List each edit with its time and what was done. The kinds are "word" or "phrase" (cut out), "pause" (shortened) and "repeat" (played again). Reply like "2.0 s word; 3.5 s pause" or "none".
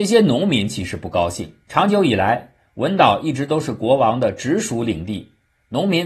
1.6 s pause